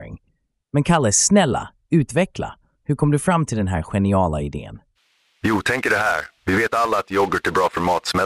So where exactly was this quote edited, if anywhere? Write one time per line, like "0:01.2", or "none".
0:05.0
0:06.4